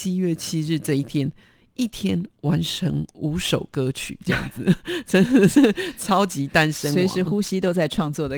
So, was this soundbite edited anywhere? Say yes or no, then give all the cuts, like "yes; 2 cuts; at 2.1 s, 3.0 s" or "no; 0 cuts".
no; 0 cuts